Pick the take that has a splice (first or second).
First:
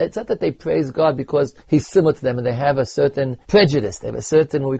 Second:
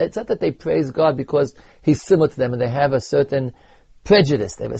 first